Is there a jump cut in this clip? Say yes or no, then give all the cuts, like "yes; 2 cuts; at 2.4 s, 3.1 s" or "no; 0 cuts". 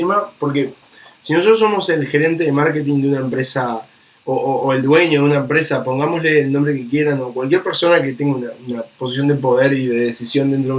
no; 0 cuts